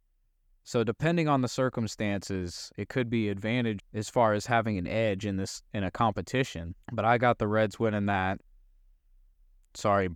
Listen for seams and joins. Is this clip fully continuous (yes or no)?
no